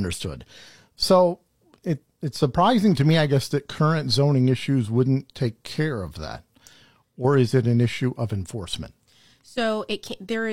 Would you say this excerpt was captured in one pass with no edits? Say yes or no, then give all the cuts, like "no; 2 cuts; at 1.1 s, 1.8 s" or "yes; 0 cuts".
no; 1 cut; at 1.8 s